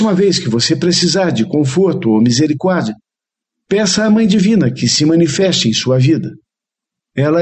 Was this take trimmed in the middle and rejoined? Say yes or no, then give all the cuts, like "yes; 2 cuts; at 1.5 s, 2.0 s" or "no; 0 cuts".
no; 0 cuts